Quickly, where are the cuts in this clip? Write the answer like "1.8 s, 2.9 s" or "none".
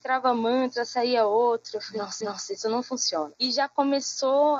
2.2 s